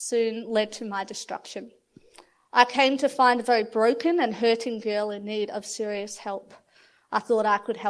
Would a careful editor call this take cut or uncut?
uncut